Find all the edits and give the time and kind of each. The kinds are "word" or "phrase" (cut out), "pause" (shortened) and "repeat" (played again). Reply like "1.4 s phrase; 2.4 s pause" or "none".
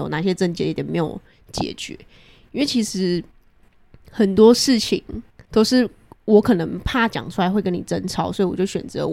5.5 s pause